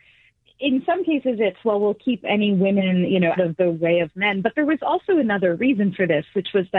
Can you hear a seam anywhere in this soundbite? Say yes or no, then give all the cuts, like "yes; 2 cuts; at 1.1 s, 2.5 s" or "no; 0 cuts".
yes; 1 cut; at 3.4 s